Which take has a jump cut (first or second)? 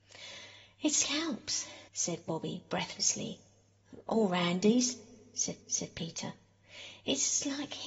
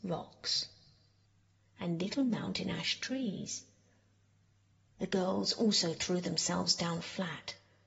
first